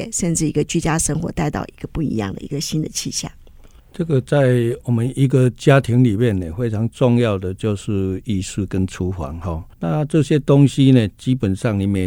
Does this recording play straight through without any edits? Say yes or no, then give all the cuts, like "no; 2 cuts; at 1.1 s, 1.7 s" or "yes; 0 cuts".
no; 1 cut; at 9.7 s